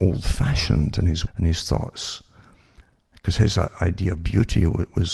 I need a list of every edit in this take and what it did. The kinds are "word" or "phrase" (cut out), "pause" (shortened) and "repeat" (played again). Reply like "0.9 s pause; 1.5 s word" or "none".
1.3 s word